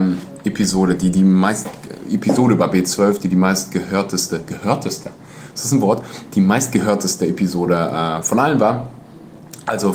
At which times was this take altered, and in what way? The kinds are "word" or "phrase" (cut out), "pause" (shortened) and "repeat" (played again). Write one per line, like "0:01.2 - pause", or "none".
none